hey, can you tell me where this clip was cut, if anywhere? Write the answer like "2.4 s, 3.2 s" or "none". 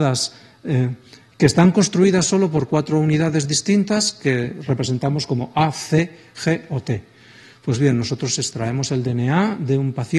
none